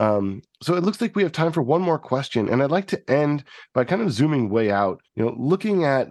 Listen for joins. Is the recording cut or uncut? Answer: cut